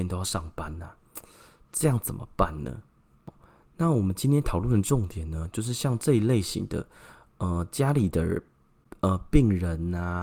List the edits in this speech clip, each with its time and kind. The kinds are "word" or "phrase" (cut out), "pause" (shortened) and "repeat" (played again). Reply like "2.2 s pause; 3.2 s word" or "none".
none